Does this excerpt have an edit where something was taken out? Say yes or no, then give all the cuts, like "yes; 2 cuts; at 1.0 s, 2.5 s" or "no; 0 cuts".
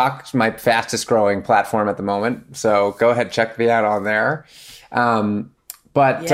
no; 0 cuts